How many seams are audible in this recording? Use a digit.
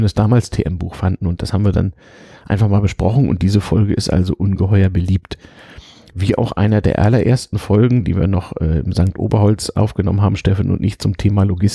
0